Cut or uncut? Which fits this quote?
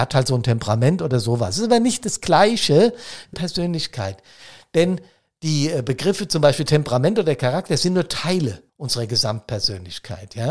cut